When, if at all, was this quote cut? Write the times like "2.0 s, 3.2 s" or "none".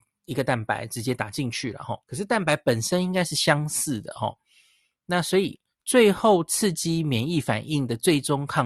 2.0 s